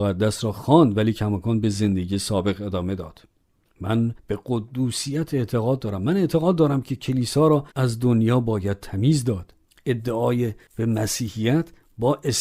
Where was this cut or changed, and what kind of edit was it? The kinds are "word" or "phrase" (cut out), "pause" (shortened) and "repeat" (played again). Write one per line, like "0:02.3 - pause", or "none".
0:04.2 - pause
0:07.7 - pause
0:09.6 - pause